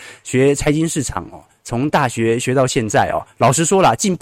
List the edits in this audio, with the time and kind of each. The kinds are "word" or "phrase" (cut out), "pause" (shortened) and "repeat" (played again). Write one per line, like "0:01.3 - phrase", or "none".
none